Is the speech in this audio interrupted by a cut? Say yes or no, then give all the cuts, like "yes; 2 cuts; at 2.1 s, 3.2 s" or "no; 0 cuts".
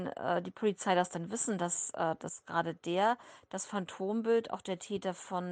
no; 0 cuts